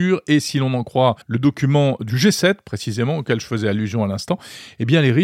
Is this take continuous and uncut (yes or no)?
no